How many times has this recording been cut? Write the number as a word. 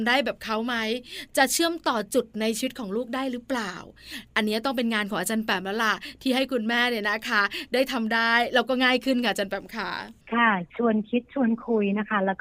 one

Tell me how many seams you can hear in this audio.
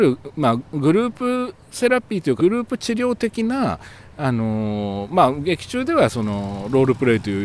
one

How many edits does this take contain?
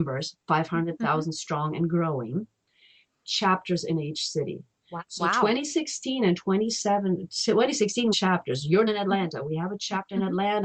four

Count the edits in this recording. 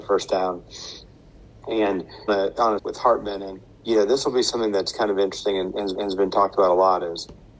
four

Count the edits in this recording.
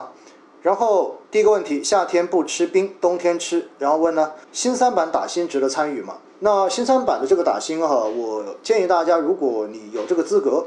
three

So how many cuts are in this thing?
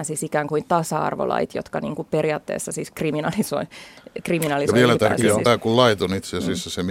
zero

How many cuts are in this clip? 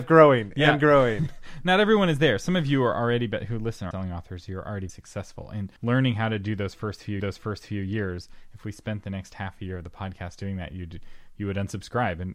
four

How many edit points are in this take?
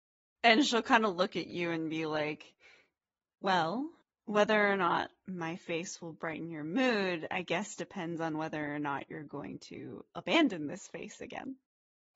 zero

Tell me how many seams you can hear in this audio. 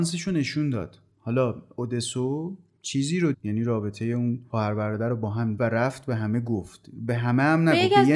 two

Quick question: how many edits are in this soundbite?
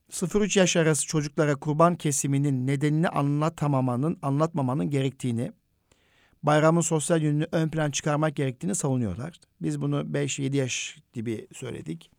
zero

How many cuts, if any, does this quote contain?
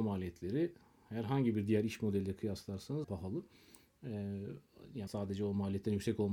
two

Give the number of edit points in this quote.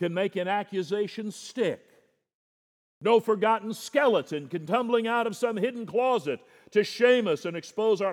one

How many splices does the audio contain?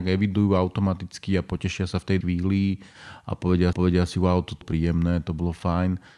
three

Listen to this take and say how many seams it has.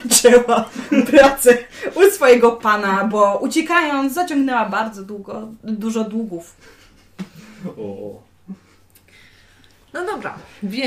zero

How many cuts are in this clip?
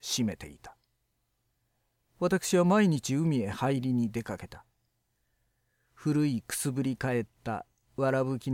zero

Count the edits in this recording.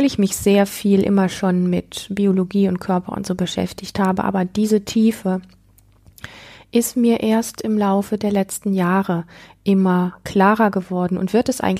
zero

